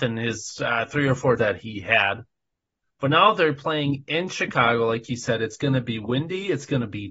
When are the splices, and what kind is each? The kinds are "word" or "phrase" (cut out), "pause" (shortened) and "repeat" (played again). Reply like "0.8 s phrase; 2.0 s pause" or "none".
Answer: 1.4 s word